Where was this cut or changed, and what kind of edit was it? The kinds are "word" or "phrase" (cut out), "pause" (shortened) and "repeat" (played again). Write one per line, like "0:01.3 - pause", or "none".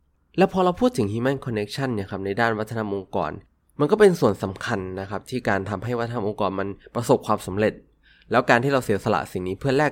none

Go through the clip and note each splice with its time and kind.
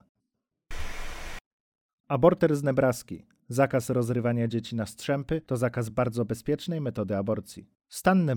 none

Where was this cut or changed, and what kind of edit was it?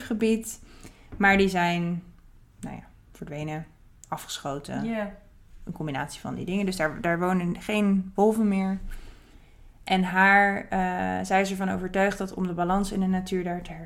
none

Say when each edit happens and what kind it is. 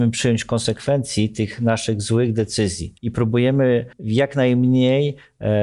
0:03.0 - pause
0:03.9 - pause

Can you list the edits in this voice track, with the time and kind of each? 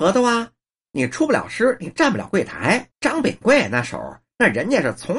0:02.9 - pause

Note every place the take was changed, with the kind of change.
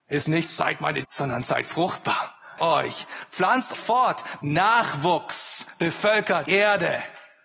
0:01.0 - word
0:02.6 - word
0:03.7 - word
0:04.4 - word
0:06.5 - word

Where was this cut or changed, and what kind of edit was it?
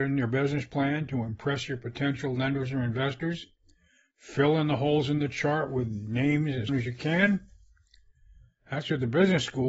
0:06.7 - word

